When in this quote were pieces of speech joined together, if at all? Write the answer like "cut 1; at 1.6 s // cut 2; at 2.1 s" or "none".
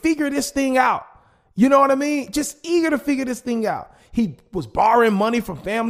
none